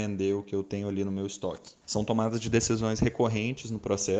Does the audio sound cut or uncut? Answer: uncut